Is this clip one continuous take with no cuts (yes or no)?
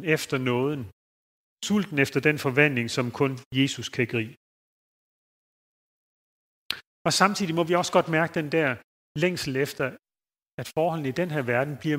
yes